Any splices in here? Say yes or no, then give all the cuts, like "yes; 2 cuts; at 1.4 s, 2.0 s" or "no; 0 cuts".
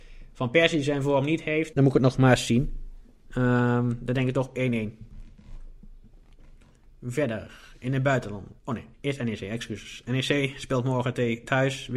yes; 3 cuts; at 1.7 s, 8.6 s, 8.9 s